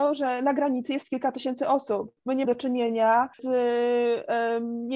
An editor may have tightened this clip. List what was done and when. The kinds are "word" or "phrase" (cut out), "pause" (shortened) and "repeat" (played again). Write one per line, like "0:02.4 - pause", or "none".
0:02.4 - word
0:03.3 - pause